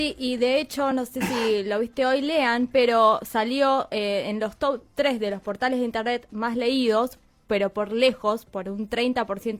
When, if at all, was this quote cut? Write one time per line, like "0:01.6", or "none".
none